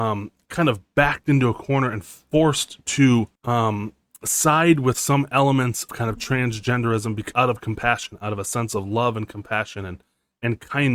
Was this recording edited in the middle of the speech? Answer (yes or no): yes